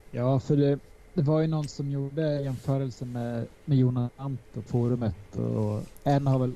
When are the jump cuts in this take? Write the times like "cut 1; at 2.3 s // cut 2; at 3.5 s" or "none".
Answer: cut 1; at 3.5 s // cut 2; at 4.7 s